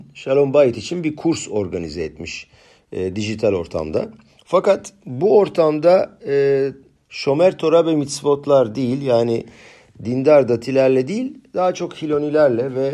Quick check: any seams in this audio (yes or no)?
no